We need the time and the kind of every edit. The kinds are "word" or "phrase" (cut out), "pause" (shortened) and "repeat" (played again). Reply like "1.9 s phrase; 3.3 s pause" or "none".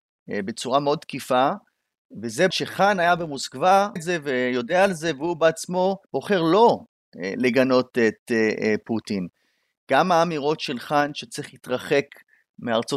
2.5 s word; 4.0 s word; 6.0 s pause